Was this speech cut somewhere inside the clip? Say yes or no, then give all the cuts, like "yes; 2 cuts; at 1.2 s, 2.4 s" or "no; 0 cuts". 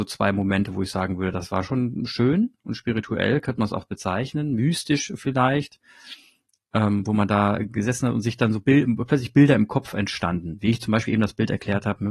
no; 0 cuts